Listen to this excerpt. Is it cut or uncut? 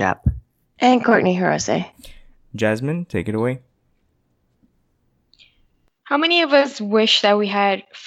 uncut